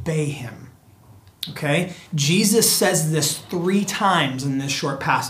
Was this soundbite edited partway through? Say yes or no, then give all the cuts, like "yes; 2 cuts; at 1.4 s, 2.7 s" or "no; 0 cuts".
yes; 1 cut; at 2.1 s